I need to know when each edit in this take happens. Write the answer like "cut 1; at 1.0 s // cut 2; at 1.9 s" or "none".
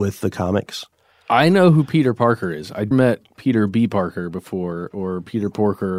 cut 1; at 2.9 s